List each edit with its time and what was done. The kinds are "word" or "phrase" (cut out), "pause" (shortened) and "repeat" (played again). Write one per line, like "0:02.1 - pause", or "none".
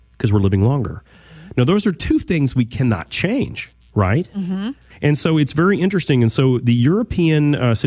0:01.1 - pause

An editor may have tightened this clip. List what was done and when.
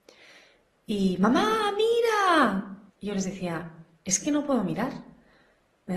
0:02.9 - pause

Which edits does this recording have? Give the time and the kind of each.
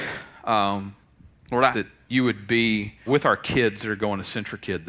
0:01.7 - word
0:03.1 - word

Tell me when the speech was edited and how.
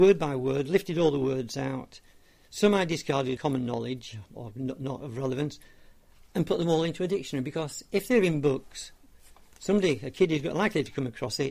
0:03.4 - word

